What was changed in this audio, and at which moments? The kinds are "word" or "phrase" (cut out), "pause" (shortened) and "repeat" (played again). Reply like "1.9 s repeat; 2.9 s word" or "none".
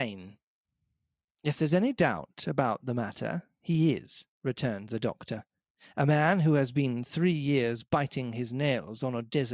4.3 s pause